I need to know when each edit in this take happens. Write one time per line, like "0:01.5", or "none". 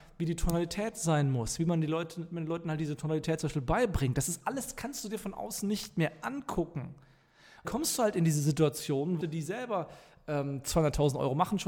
0:07.6
0:09.2